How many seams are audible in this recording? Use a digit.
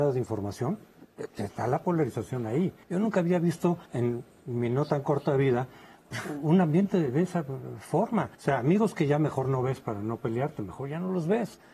3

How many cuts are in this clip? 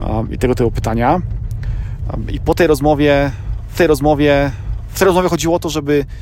1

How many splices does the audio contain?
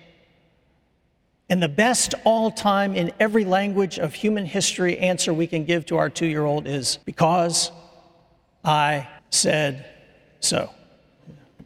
2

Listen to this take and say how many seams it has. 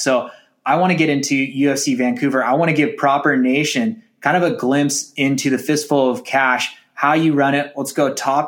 0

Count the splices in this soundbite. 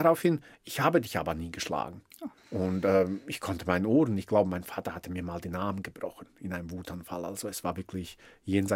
1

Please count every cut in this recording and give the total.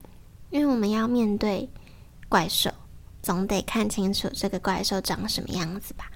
0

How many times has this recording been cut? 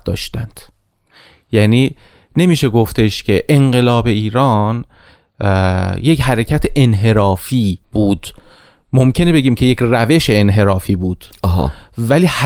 1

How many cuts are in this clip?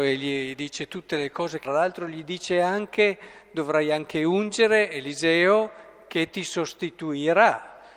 1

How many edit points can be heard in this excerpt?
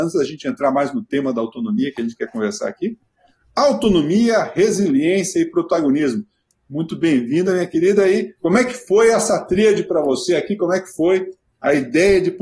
1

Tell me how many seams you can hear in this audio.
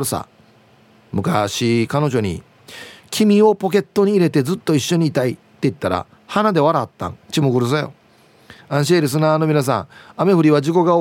1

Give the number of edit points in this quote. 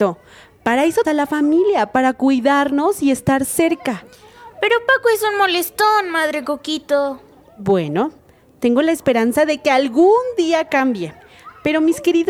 1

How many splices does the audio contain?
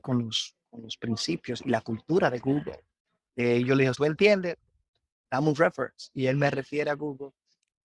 1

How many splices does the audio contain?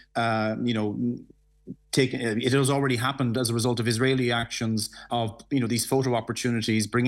1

